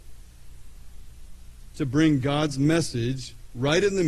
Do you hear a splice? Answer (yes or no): no